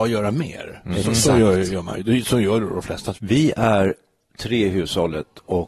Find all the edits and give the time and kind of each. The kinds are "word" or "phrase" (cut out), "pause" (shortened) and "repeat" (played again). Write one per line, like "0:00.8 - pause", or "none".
none